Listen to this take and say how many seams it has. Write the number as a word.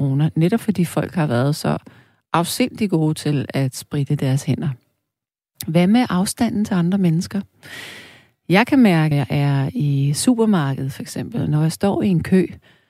one